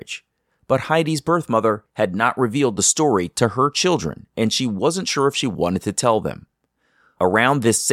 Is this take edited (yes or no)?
no